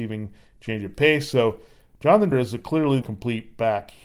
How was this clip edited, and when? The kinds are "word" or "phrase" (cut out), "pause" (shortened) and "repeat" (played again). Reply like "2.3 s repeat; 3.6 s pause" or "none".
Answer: 2.3 s word; 3.0 s word

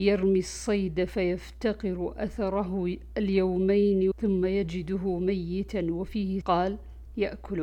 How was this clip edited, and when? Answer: 4.1 s word; 6.4 s word

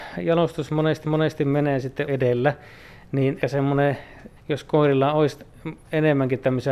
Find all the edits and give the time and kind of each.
1.0 s repeat; 2.1 s word; 3.4 s word; 4.4 s pause

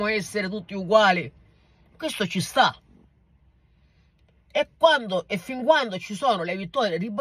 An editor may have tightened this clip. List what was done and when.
none

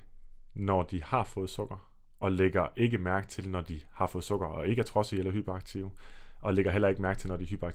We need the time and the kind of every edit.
none

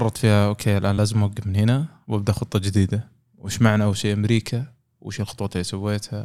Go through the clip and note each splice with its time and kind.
none

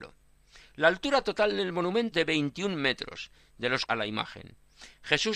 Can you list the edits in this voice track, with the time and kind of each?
2.1 s word; 3.9 s phrase

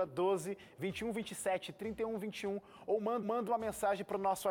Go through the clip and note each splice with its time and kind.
3.2 s repeat

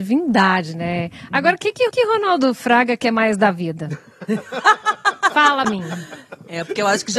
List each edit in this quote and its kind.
1.9 s repeat; 5.6 s word

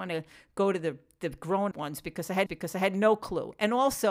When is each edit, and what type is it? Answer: 1.7 s word; 2.5 s repeat

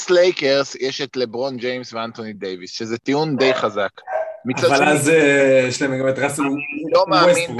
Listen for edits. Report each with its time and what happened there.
none

